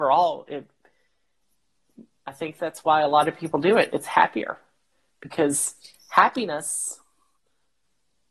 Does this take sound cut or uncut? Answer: uncut